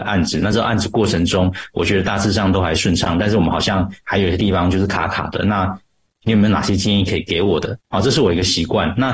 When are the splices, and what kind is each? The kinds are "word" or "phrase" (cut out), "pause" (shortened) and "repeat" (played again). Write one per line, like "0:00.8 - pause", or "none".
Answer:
0:07.8 - pause